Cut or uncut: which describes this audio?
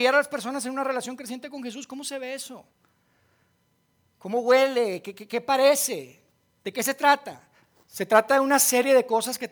uncut